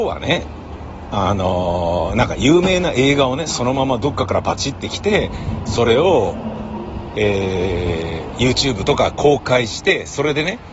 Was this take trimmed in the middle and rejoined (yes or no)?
no